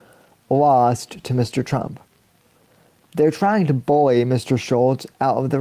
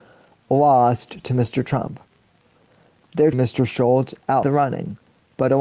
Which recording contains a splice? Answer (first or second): second